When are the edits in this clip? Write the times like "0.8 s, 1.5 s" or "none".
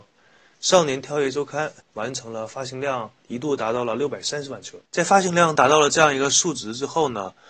1.8 s, 3.2 s, 4.9 s

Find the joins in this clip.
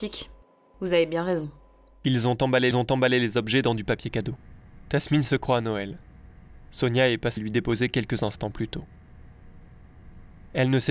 2.7 s, 7.4 s

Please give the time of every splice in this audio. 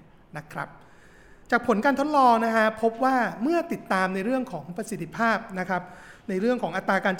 1.4 s

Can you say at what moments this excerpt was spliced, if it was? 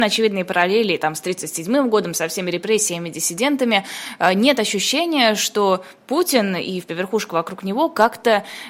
6.9 s

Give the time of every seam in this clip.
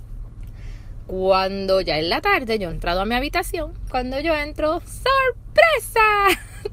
2.7 s

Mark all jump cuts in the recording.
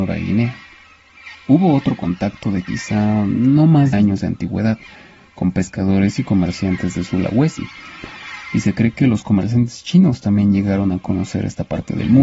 1.3 s, 3.9 s

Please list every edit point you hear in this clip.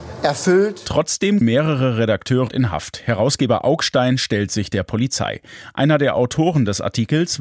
1.4 s, 2.5 s

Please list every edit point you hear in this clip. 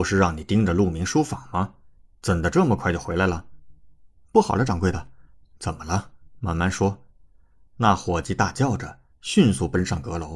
none

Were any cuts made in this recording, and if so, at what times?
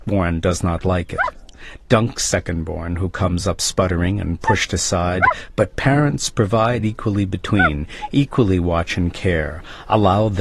none

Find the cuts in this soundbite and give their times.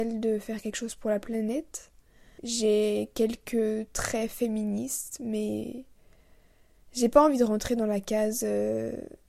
none

